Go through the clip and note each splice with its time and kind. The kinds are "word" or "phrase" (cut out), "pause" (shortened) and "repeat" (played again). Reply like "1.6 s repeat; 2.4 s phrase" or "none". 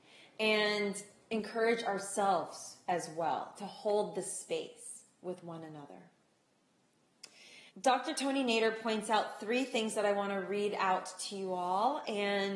7.7 s pause